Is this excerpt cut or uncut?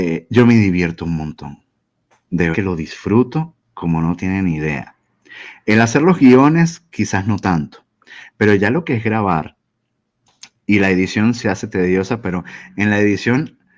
cut